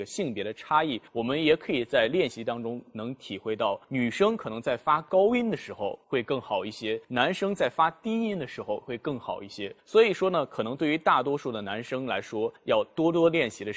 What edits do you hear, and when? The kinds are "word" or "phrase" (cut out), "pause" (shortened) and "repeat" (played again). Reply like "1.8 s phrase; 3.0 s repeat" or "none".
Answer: 1.1 s pause; 3.8 s pause; 6.0 s pause; 7.0 s pause; 9.8 s pause; 12.6 s pause

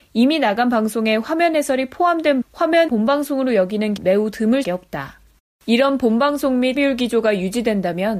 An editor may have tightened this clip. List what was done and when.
2.4 s word; 2.9 s word; 4.0 s word; 4.6 s word; 5.4 s pause; 6.8 s word

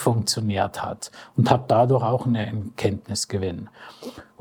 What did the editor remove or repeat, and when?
none

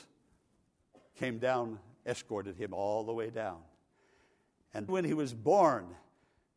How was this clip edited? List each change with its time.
4.9 s word

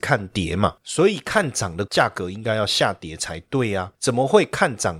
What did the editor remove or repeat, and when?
1.9 s word

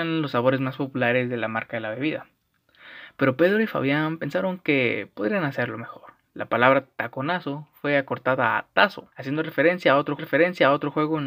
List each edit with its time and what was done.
9.1 s pause; 10.2 s repeat

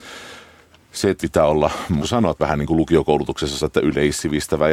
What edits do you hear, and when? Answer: 1.2 s word; 2.0 s word; 2.4 s word; 3.6 s word

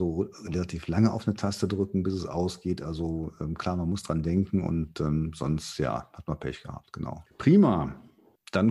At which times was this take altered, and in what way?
none

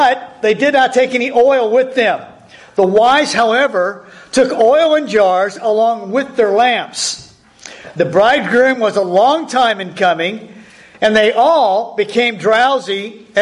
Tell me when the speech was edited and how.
none

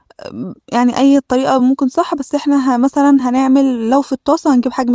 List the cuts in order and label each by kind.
none

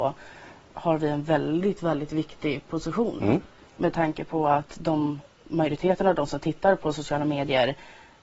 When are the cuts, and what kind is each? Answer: none

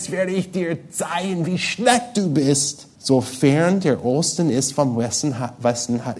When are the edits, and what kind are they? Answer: 2.9 s pause

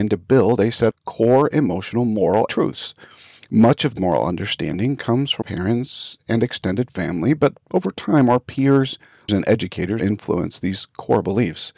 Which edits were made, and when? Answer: 0.9 s word; 2.5 s word; 4.0 s word; 5.4 s word; 9.3 s word; 10.0 s word

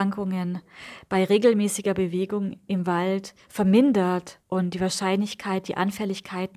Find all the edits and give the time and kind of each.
4.4 s pause

